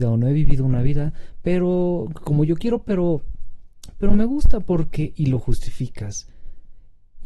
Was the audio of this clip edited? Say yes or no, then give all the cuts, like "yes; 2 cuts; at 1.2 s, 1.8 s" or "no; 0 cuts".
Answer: no; 0 cuts